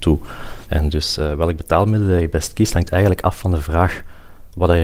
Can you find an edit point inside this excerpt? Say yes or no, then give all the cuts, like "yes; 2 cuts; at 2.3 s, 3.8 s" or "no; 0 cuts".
no; 0 cuts